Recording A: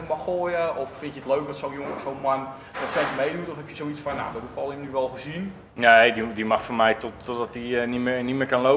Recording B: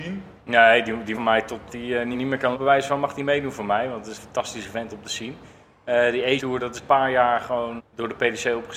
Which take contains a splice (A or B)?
B